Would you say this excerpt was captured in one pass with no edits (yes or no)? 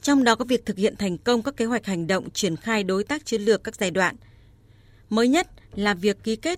yes